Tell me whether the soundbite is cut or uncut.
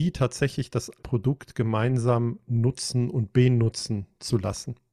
cut